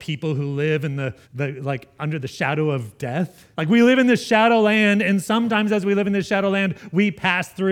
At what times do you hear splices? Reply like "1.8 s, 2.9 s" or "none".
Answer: 1.2 s, 3.5 s